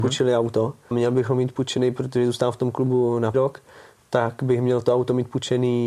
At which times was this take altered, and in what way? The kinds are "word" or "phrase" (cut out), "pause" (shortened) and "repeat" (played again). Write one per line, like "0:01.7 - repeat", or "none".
0:00.9 - word
0:03.3 - word